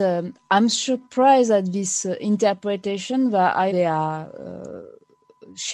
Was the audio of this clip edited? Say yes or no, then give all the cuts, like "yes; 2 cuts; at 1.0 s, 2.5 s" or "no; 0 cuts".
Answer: yes; 1 cut; at 3.7 s